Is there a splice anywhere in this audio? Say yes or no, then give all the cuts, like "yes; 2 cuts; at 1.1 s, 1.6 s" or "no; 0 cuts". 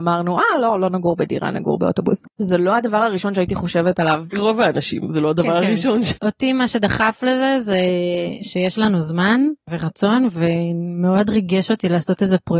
no; 0 cuts